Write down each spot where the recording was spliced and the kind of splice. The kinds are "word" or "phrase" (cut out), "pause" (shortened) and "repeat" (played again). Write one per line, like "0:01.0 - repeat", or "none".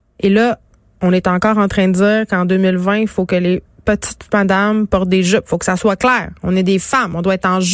none